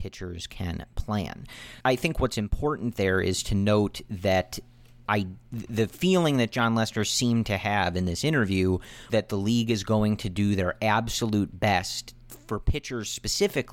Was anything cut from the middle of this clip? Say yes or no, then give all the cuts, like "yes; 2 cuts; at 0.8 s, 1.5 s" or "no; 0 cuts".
yes; 3 cuts; at 1.8 s, 5.1 s, 9.1 s